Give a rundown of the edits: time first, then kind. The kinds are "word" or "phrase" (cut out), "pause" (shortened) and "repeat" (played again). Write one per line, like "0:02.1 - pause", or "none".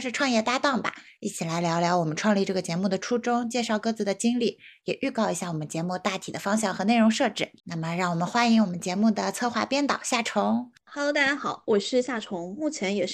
0:07.6 - pause